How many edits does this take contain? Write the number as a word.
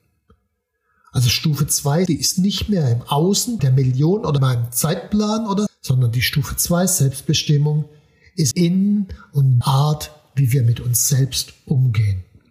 six